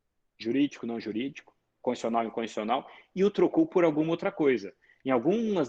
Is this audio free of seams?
yes; 0 cuts

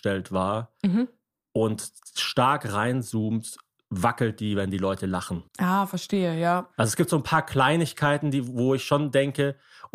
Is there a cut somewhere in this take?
yes; 1 cut; at 5.5 s

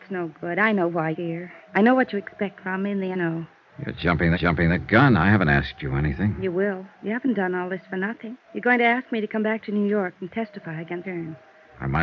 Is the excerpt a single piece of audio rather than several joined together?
no; 7 cuts; at 1.1 s, 1.7 s, 3.1 s, 4.3 s, 6.9 s, 8.4 s, 11.0 s

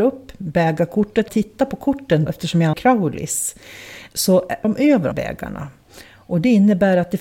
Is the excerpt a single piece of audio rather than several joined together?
no; 5 cuts; at 1.3 s, 2.3 s, 2.7 s, 4.6 s, 5.1 s

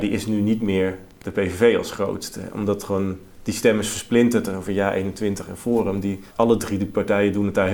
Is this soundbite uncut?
no; 1 cut; at 6.3 s

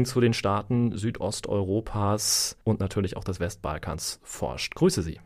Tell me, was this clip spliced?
yes; 1 cut; at 2.6 s

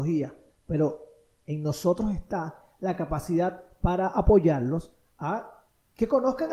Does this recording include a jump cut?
no; 0 cuts

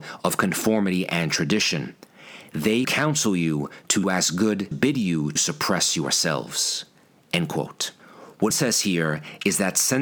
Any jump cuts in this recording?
yes; 5 cuts; at 2.8 s, 4.0 s, 4.7 s, 5.4 s, 8.5 s

